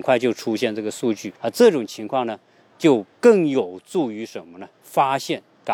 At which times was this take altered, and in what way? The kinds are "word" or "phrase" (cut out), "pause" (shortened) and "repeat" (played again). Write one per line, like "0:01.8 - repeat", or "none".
0:01.4 - pause
0:03.1 - pause
0:04.7 - pause